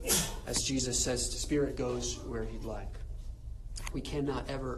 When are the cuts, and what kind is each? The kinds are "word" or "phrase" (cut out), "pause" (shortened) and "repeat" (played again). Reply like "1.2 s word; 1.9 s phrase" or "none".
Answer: 1.3 s phrase